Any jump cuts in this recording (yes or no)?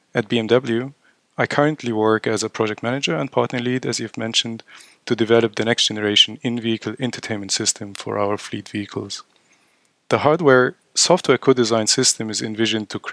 no